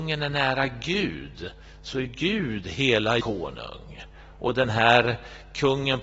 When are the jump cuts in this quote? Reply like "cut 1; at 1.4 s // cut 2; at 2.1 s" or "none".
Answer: cut 1; at 2.0 s // cut 2; at 3.2 s